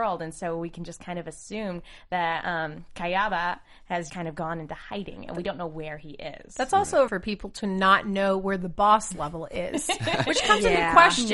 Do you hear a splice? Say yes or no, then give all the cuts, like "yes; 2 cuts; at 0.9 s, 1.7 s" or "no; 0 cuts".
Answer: yes; 2 cuts; at 4.1 s, 7.1 s